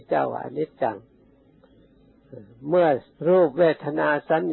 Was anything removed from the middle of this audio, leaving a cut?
yes; 1 cut; at 3.1 s

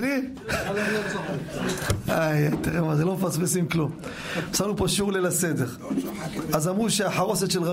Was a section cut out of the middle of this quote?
yes; 1 cut; at 2.5 s

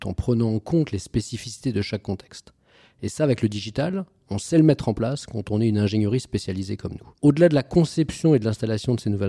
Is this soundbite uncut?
no; 1 cut; at 7.2 s

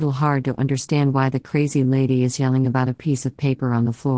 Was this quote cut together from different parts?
no; 0 cuts

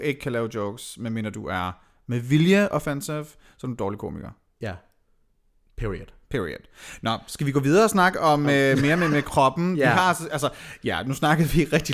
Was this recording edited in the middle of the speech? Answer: no; 0 cuts

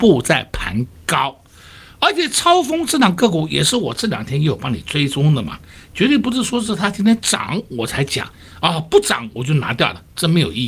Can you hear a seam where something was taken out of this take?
no; 0 cuts

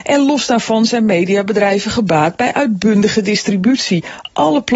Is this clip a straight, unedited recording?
yes; 0 cuts

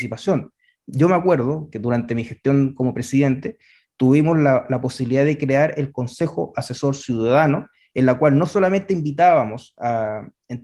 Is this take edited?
no; 0 cuts

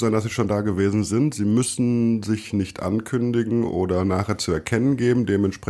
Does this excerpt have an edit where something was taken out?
no; 0 cuts

